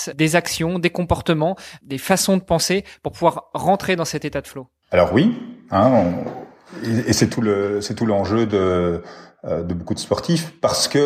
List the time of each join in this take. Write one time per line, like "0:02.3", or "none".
none